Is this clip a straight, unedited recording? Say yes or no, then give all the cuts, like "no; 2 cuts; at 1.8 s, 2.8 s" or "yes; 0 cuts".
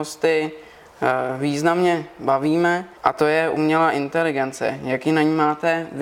no; 1 cut; at 3.0 s